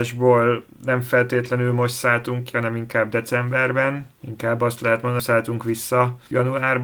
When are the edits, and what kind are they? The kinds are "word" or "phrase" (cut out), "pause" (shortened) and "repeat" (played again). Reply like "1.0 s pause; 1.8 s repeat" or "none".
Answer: 4.2 s pause; 5.2 s phrase

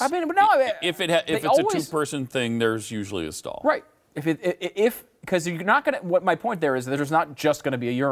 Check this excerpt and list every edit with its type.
none

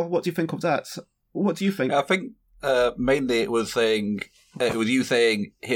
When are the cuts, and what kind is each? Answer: none

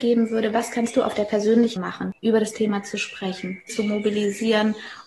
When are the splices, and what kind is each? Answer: 1.8 s word; 2.2 s pause; 3.7 s word

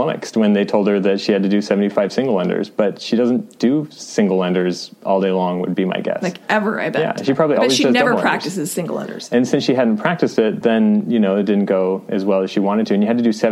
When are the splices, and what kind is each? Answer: none

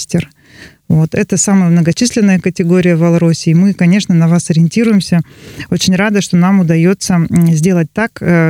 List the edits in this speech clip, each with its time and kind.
none

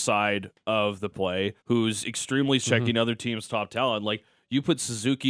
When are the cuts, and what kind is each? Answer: 1.1 s word; 1.6 s pause; 2.6 s word

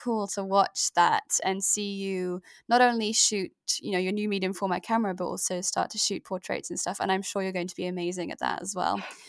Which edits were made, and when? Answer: none

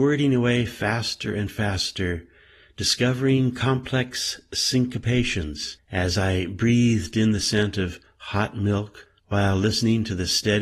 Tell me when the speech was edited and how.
none

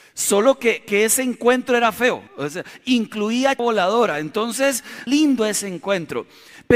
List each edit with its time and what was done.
2.3 s pause; 3.6 s word; 5.1 s phrase

